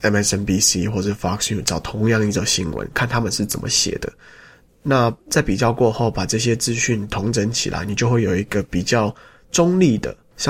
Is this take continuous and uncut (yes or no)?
yes